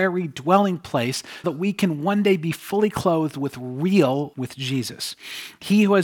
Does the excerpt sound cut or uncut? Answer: cut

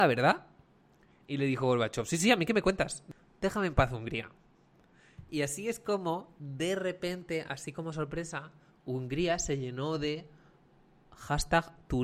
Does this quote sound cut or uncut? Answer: uncut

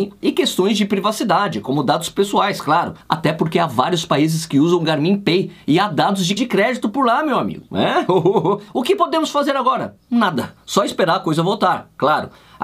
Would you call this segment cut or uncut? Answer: cut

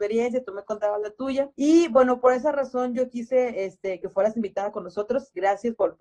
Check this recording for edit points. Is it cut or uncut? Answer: cut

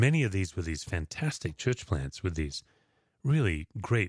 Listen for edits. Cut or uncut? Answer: uncut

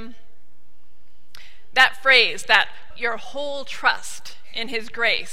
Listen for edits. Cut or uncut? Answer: cut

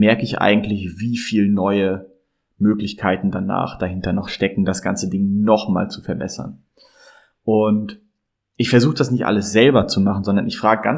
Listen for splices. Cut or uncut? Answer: uncut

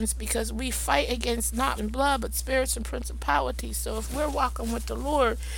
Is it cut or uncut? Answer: cut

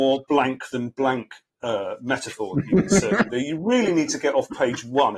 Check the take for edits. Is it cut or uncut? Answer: uncut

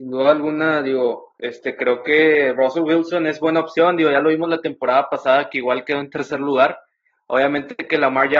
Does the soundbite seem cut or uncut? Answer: uncut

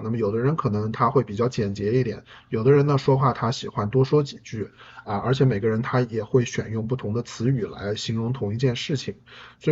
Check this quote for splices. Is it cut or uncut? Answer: uncut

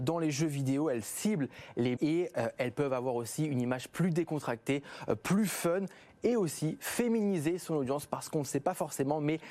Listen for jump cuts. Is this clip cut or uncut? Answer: cut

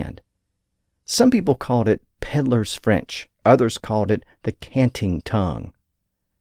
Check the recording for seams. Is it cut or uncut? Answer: cut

